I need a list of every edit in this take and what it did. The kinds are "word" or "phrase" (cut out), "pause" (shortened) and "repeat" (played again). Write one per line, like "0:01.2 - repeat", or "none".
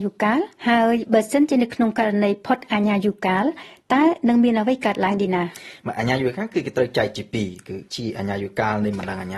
0:07.9 - pause

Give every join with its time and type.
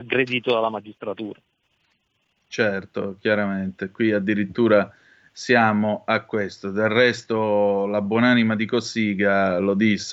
none

